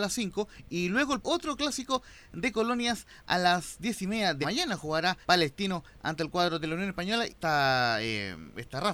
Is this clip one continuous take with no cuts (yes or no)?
no